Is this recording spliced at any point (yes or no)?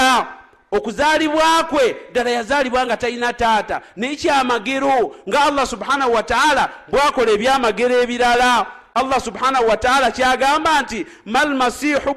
no